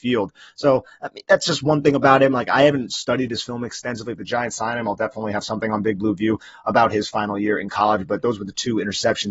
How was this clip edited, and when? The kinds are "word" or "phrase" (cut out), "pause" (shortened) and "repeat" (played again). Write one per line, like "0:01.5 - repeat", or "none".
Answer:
none